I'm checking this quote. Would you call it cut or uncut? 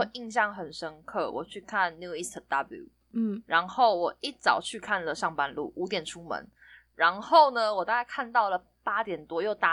uncut